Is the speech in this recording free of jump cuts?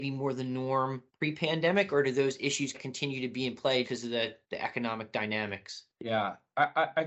no; 5 cuts; at 1.1 s, 2.7 s, 3.8 s, 4.4 s, 5.9 s

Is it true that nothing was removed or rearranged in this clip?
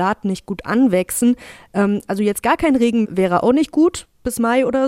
no; 1 cut; at 3.0 s

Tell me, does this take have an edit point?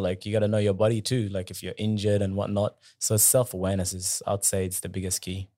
no; 0 cuts

